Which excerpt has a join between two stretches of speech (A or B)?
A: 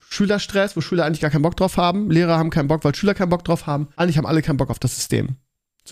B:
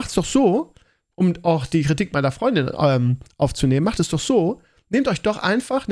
A